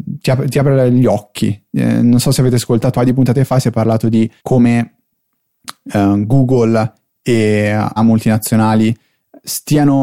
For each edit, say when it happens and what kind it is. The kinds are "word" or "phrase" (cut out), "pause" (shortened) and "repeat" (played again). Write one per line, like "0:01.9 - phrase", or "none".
0:02.9 - word
0:04.4 - pause
0:08.0 - phrase